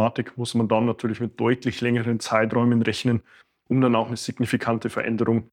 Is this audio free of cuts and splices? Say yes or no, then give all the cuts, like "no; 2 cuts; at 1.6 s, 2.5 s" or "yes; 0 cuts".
yes; 0 cuts